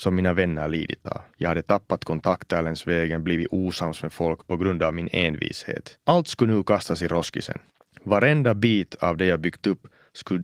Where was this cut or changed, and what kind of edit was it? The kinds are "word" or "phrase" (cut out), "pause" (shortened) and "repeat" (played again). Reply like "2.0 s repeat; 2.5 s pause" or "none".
1.3 s pause; 6.0 s pause; 7.7 s pause

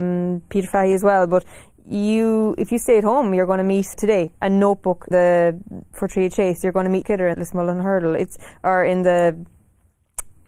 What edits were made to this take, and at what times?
3.9 s word; 4.3 s pause; 5.1 s word; 7.0 s phrase; 7.3 s word

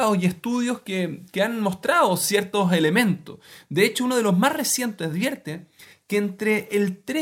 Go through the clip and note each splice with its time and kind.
none

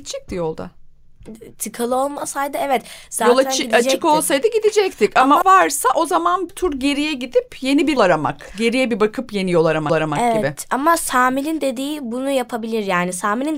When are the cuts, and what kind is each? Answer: 5.4 s phrase; 6.5 s word; 8.0 s word; 9.9 s repeat

